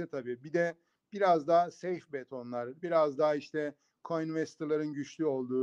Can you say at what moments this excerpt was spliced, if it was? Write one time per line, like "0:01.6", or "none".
0:02.8